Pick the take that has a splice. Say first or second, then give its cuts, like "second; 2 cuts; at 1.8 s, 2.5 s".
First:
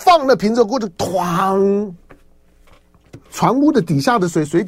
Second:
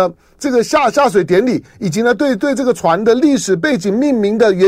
first; 1 cut; at 3.3 s